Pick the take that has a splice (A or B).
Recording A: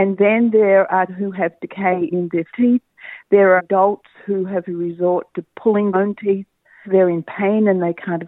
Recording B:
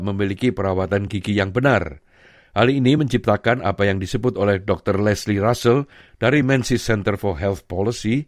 A